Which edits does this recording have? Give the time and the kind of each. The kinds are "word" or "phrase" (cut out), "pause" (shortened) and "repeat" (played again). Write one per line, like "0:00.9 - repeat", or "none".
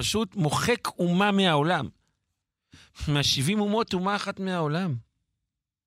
0:03.9 - word